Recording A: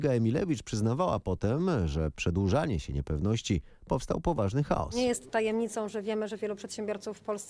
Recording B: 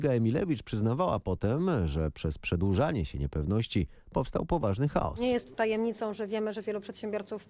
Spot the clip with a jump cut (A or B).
A